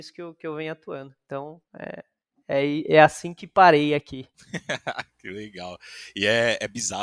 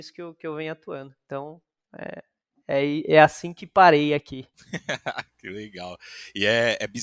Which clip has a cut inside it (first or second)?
first